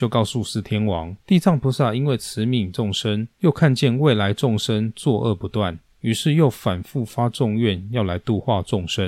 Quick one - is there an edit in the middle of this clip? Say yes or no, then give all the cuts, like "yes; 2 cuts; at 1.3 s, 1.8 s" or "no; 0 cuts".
yes; 2 cuts; at 1.2 s, 3.3 s